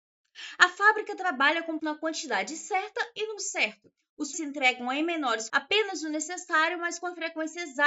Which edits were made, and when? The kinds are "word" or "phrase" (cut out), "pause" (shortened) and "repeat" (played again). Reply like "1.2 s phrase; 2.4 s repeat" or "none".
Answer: 1.8 s word; 3.4 s word; 4.3 s word; 5.5 s word

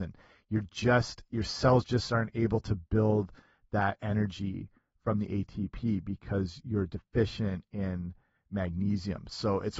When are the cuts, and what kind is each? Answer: none

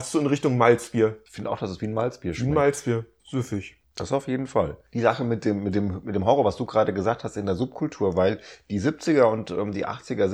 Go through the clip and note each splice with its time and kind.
none

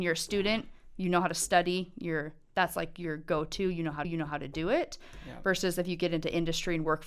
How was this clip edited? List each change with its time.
4.0 s repeat

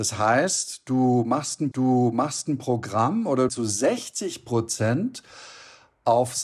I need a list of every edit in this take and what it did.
1.7 s repeat; 3.5 s phrase

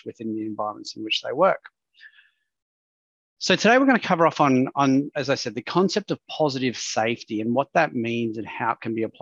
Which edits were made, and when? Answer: none

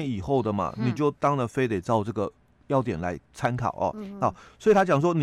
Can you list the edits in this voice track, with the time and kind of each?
3.2 s pause

